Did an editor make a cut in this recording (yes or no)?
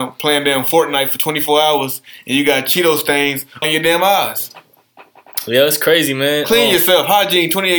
yes